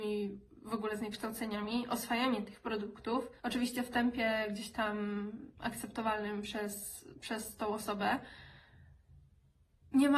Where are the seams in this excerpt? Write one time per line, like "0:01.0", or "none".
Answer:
0:03.4